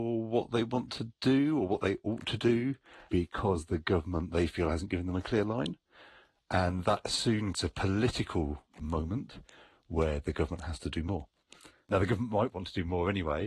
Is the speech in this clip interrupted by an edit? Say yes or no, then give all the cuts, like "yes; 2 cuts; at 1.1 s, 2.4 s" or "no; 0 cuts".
yes; 1 cut; at 7.5 s